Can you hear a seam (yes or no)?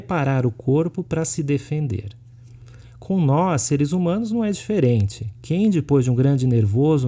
no